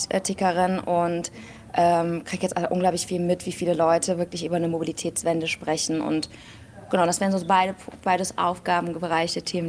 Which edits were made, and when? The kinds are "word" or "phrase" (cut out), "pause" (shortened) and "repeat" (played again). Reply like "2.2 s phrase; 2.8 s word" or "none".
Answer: none